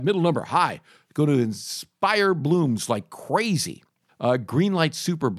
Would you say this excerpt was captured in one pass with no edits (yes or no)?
no